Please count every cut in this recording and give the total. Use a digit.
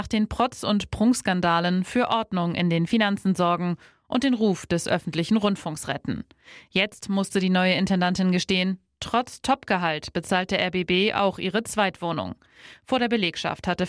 0